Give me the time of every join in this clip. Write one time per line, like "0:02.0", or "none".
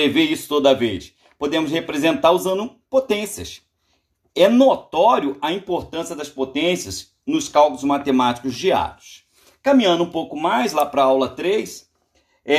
none